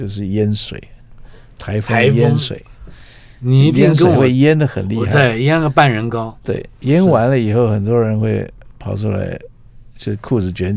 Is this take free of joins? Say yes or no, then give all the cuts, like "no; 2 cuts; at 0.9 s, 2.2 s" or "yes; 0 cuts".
yes; 0 cuts